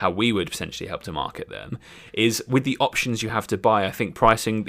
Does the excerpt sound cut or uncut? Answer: uncut